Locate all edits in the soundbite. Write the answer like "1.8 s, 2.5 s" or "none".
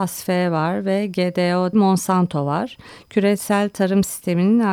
1.7 s

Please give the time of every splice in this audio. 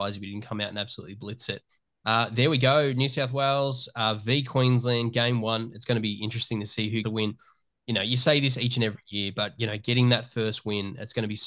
7.0 s

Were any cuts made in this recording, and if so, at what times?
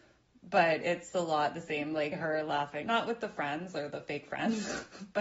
2.1 s, 2.8 s

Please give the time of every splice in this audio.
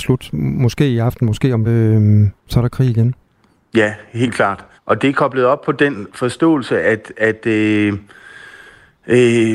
1.6 s, 2.4 s, 3.5 s, 4.7 s

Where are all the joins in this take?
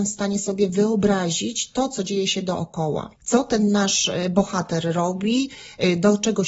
3.2 s

